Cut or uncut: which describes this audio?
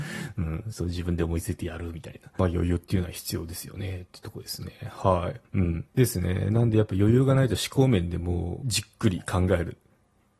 cut